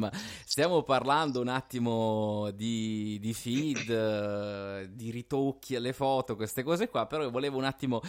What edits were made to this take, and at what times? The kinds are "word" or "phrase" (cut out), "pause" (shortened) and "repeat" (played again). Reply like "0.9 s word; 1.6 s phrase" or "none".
none